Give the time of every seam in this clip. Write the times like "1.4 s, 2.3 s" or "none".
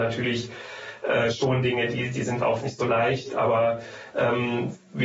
2.6 s